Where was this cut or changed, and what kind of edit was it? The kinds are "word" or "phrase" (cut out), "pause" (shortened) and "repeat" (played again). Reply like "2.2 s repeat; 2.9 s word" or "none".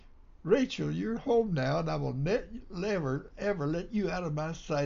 none